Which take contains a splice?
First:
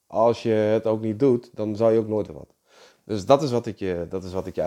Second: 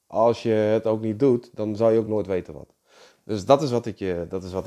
first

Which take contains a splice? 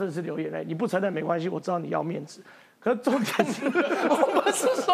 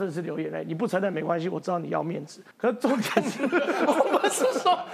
second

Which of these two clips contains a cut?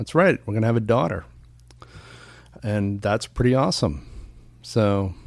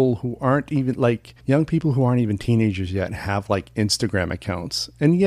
second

